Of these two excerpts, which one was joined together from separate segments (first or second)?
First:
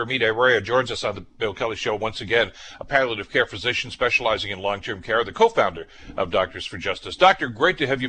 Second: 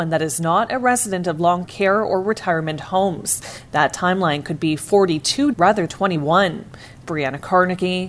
second